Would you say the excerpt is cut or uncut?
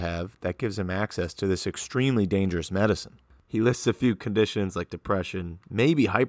uncut